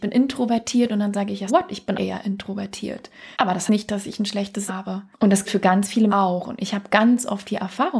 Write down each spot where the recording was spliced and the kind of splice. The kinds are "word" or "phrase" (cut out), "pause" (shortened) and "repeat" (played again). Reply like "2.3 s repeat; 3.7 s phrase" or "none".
1.5 s word; 1.9 s word; 3.3 s pause; 3.7 s word; 4.7 s word; 5.1 s pause; 5.5 s word; 6.1 s phrase